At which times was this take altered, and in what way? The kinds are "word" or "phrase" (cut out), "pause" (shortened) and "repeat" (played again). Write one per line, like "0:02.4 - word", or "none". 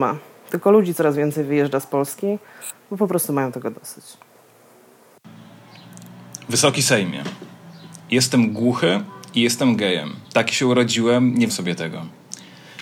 0:10.2 - pause
0:11.5 - word